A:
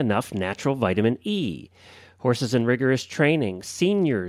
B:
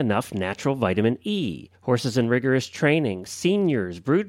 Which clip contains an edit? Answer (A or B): B